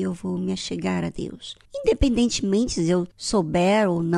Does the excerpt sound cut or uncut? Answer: cut